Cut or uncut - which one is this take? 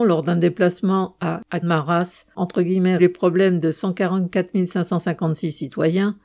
cut